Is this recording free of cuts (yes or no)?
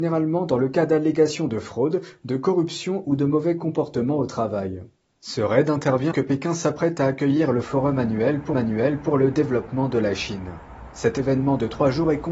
no